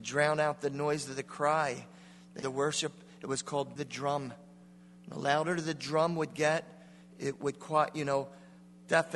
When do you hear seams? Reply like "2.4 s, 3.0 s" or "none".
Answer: 2.4 s, 3.8 s